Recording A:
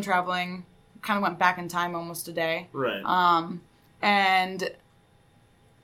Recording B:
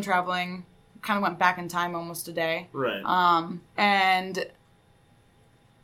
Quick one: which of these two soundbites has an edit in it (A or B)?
B